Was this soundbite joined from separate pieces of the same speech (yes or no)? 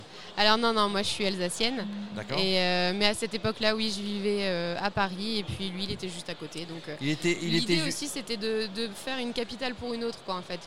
no